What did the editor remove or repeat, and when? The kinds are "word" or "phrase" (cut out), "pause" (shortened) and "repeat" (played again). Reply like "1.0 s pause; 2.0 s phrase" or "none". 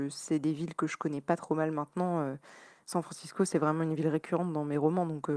none